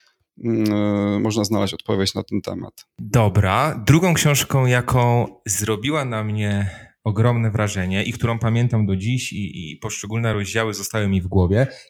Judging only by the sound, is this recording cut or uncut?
uncut